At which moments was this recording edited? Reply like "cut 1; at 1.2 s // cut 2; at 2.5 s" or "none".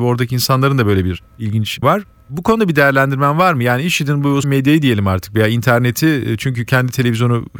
cut 1; at 1.8 s // cut 2; at 4.4 s